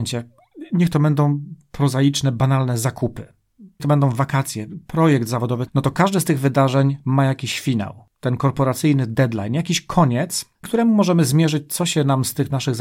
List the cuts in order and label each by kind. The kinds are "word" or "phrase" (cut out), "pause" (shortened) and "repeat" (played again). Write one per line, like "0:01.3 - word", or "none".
0:03.8 - phrase
0:05.7 - word
0:10.6 - word

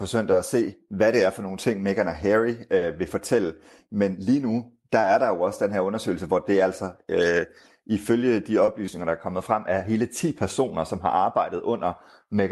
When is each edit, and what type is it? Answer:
none

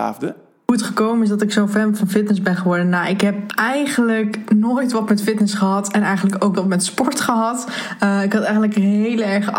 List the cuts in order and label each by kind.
0:03.5 - word
0:06.5 - word

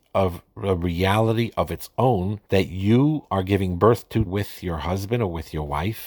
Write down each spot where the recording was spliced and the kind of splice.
0:02.5 - pause
0:04.3 - word

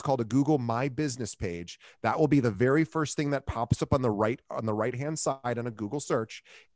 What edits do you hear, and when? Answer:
none

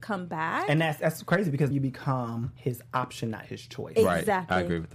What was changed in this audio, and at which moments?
0:01.7 - word
0:02.6 - pause

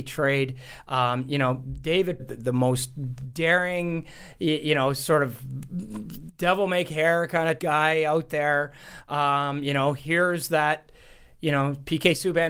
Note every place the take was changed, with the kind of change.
0:02.2 - phrase
0:07.6 - word

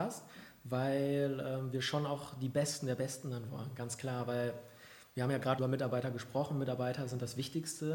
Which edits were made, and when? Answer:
0:05.6 - word

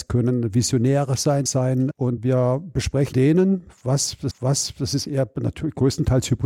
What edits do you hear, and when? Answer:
0:01.5 - phrase
0:03.1 - word
0:04.3 - repeat

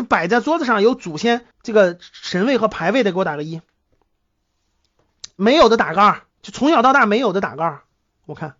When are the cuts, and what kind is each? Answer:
0:01.5 - pause
0:06.3 - pause

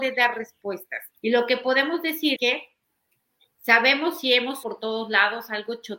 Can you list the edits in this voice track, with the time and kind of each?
0:01.1 - pause
0:02.4 - word
0:04.6 - word

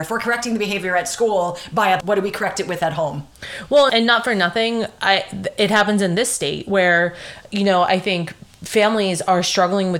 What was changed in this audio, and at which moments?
0:02.0 - word
0:03.9 - word

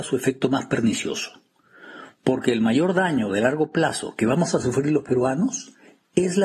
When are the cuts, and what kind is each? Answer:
none

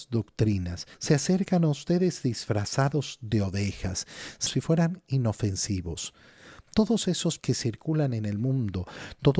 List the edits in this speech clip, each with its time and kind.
0:00.9 - pause
0:04.5 - phrase
0:07.4 - word

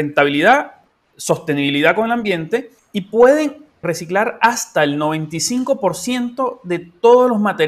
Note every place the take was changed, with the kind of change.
0:02.8 - pause
0:03.8 - word

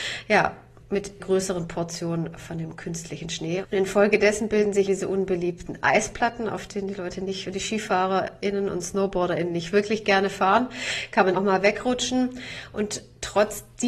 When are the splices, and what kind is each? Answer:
0:01.2 - word
0:04.9 - word
0:11.3 - word

